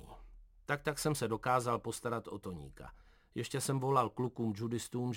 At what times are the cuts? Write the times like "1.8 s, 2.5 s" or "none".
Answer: none